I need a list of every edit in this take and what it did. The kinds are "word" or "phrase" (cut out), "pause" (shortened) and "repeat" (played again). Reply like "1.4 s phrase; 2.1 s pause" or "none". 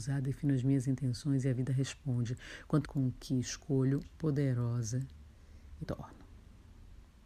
2.8 s phrase; 4.0 s word; 5.8 s word